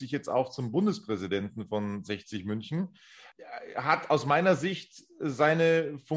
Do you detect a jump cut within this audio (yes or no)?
no